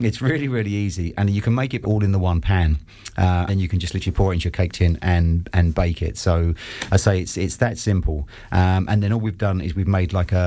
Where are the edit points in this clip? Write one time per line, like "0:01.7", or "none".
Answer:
0:01.8
0:03.5